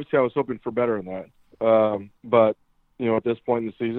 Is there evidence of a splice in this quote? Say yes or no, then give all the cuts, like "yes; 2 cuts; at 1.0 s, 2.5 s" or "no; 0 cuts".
yes; 2 cuts; at 1.5 s, 2.2 s